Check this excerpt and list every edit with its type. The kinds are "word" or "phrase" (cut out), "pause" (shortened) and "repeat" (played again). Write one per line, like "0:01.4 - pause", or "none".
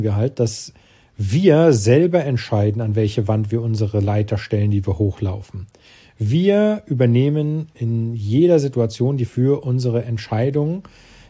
0:09.3 - word